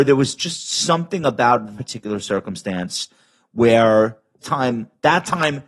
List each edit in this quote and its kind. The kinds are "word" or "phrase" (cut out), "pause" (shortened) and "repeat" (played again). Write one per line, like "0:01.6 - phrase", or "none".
0:01.8 - word
0:04.4 - word